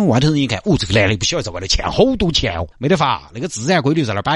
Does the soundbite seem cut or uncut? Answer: cut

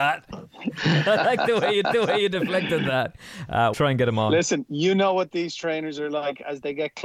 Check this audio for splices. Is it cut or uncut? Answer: cut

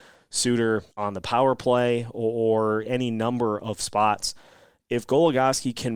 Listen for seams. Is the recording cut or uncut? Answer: cut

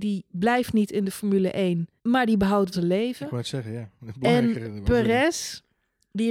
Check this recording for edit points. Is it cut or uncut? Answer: cut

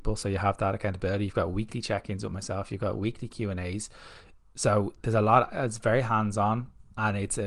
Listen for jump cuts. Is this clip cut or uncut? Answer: uncut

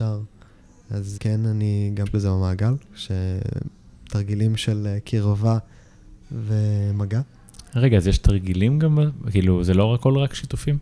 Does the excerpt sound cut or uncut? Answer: cut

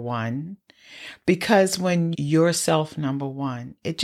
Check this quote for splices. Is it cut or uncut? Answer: cut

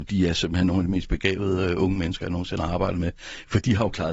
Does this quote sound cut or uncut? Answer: uncut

